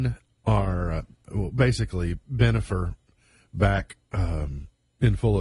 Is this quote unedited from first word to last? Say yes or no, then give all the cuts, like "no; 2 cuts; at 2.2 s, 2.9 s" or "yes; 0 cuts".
yes; 0 cuts